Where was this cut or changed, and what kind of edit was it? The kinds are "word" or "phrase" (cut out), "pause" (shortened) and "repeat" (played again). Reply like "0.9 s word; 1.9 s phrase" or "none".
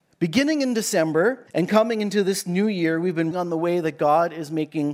1.5 s pause; 3.3 s word